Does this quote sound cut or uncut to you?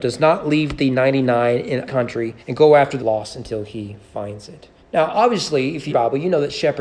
cut